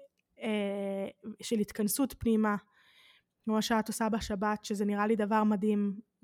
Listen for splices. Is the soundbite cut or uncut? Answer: uncut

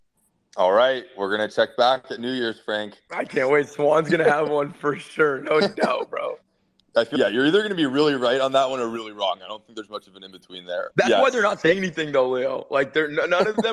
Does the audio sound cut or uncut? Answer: uncut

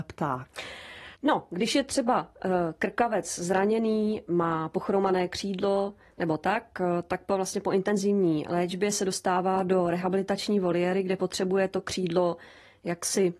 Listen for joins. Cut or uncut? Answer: cut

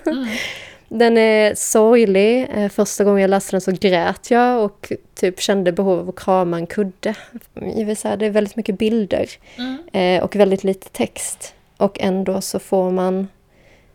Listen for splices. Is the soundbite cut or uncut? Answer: uncut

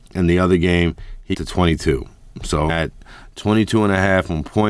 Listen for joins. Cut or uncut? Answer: cut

